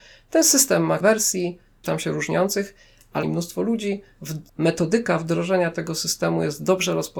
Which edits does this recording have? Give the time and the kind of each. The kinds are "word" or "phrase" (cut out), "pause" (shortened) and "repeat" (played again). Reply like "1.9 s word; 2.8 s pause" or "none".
1.0 s word; 1.8 s word; 3.2 s phrase; 4.5 s pause